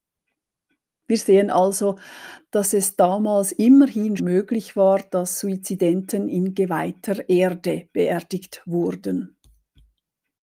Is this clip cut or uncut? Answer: cut